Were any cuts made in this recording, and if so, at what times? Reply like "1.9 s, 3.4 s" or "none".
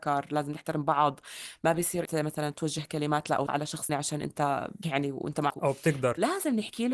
2.0 s, 3.5 s, 3.9 s, 4.8 s, 5.5 s